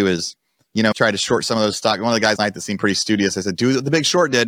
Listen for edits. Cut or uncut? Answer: cut